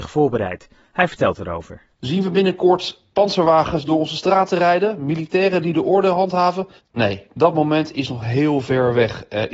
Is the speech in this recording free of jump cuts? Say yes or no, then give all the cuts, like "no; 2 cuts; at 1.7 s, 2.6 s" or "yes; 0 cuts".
no; 1 cut; at 6.8 s